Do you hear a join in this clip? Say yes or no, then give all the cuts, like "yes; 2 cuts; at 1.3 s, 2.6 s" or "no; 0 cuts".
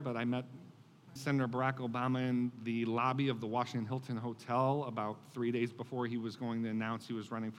yes; 1 cut; at 1.2 s